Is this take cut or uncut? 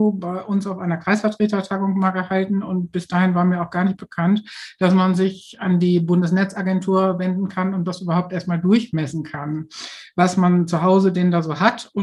uncut